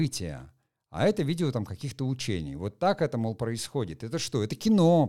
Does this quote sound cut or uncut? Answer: uncut